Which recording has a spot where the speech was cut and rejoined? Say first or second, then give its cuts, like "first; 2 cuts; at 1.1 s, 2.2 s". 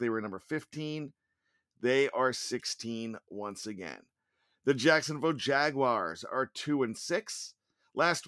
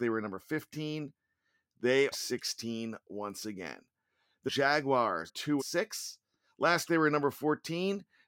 second; 5 cuts; at 2.1 s, 4.5 s, 5.3 s, 5.6 s, 6.9 s